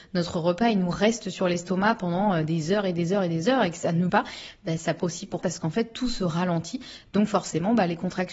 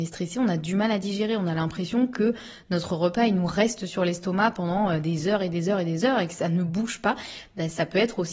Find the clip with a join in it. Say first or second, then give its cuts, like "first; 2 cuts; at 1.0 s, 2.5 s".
first; 3 cuts; at 4.1 s, 5.0 s, 5.4 s